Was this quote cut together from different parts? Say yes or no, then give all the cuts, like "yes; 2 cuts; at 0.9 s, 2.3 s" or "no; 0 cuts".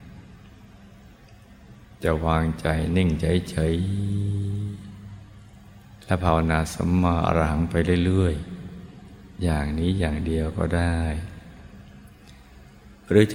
yes; 1 cut; at 6.0 s